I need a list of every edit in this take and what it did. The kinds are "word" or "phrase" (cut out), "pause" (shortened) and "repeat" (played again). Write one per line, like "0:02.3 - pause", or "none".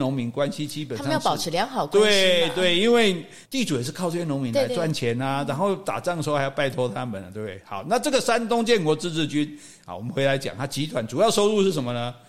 0:03.5 - pause